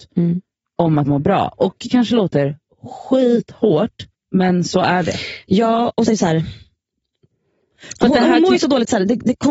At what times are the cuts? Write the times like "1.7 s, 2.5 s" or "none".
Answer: 1.1 s, 1.9 s, 4.1 s, 6.1 s